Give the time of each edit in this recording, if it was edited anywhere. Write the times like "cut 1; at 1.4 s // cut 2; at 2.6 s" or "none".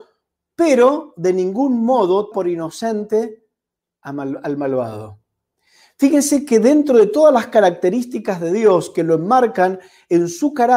cut 1; at 2.3 s

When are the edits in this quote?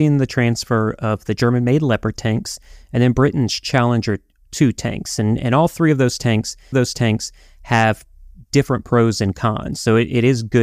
cut 1; at 6.7 s

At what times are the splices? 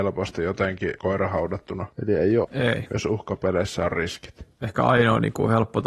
cut 1; at 1.0 s // cut 2; at 2.4 s

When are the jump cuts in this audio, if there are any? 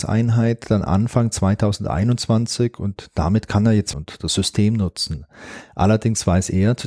cut 1; at 3.9 s

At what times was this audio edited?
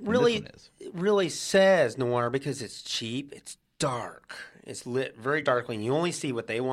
none

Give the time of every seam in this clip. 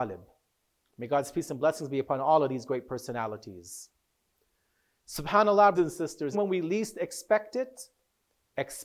cut 1; at 5.8 s // cut 2; at 6.3 s

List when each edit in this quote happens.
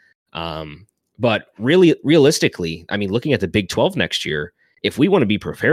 none

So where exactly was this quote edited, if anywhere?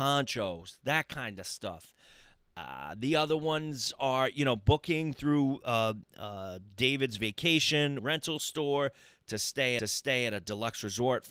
cut 1; at 8.0 s // cut 2; at 9.8 s

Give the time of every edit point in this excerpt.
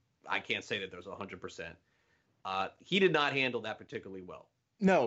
none

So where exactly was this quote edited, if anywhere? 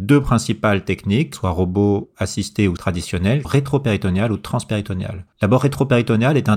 cut 1; at 1.3 s // cut 2; at 2.8 s // cut 3; at 3.4 s // cut 4; at 5.3 s

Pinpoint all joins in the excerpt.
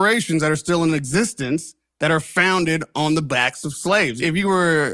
none

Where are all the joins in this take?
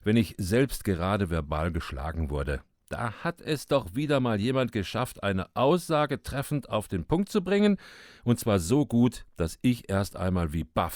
none

